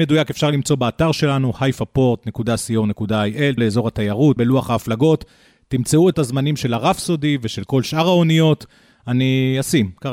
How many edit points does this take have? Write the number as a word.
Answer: three